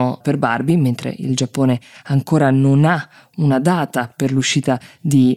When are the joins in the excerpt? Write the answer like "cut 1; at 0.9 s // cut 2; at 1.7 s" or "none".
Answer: none